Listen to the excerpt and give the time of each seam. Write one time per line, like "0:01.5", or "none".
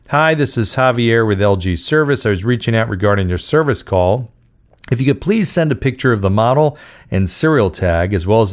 none